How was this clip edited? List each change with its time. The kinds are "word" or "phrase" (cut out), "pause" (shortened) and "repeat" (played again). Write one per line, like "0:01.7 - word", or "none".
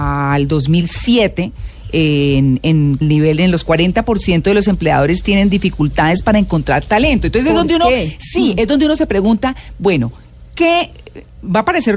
0:03.0 - phrase
0:03.7 - phrase